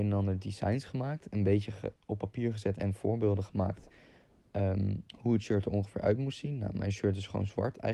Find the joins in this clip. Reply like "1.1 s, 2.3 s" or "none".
2.0 s, 5.1 s